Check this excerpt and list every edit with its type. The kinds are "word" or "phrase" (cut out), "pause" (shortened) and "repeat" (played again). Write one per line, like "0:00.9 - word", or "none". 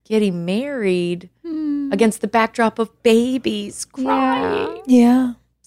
none